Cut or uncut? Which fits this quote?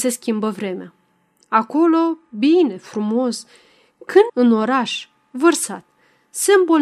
cut